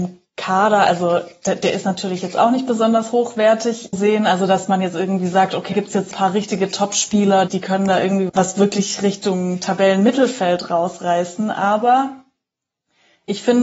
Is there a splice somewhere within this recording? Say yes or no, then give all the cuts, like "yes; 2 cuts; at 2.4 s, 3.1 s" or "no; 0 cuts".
yes; 5 cuts; at 3.9 s, 5.7 s, 6.1 s, 7.5 s, 8.3 s